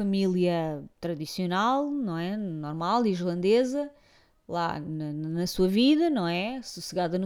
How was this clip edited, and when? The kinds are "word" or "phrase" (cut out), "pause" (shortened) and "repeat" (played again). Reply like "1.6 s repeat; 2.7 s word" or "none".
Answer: none